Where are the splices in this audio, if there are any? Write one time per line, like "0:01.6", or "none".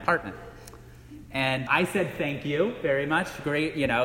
0:01.7